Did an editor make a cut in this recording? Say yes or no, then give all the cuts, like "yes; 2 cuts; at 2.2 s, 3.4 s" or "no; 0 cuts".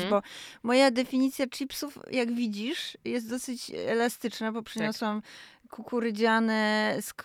no; 0 cuts